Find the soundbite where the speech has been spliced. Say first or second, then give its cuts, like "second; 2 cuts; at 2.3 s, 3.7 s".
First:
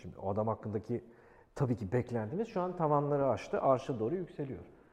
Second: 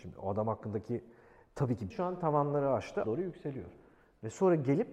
second; 2 cuts; at 1.9 s, 3.0 s